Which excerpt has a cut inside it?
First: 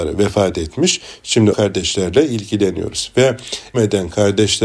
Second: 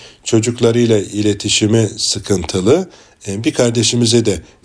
first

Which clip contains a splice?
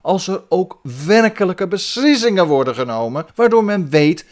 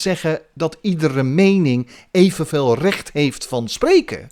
first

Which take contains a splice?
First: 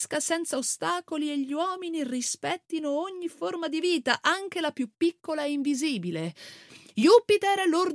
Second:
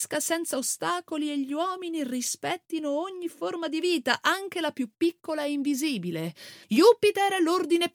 second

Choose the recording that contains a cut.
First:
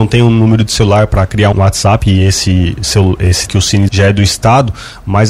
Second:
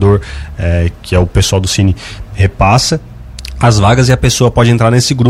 first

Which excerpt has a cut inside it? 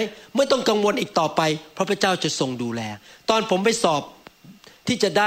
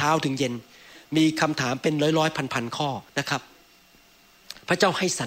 second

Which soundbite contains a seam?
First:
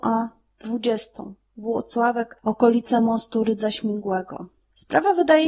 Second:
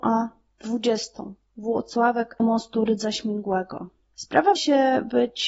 second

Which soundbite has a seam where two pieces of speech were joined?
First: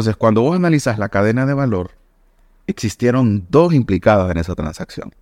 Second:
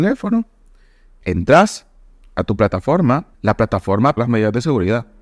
second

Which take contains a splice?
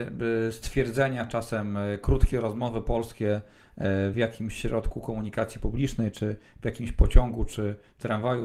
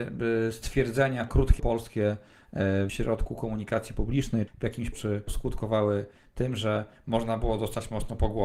second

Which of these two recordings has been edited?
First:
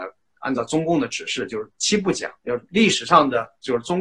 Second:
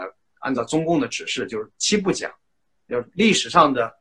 first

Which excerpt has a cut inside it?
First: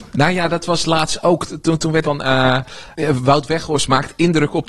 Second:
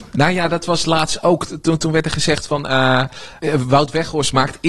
first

